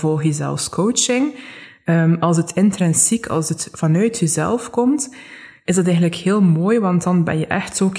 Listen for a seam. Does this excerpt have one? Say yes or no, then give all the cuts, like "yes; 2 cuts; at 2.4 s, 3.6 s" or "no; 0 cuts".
no; 0 cuts